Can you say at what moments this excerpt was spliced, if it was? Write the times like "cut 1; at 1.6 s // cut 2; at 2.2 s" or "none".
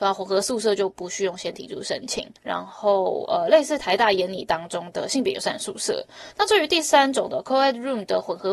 cut 1; at 2.4 s